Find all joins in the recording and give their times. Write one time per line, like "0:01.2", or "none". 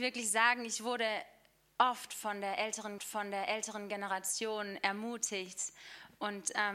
0:03.0

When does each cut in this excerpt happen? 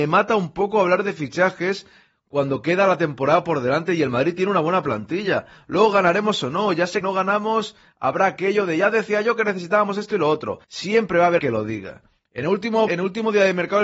0:07.0
0:10.6
0:11.4
0:12.9

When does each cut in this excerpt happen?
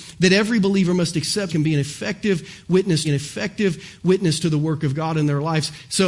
0:01.5
0:03.0

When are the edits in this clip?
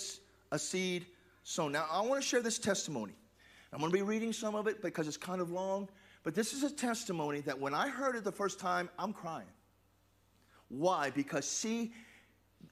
none

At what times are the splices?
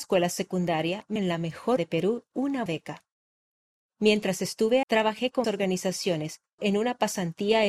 0:01.2
0:01.8
0:02.3
0:02.7
0:04.8
0:05.4
0:06.6

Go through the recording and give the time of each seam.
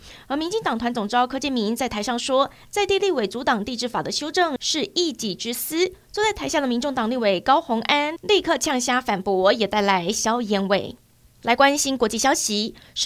none

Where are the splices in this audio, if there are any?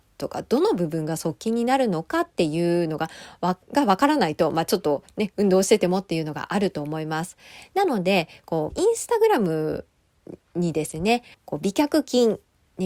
0:03.6
0:08.7
0:11.3

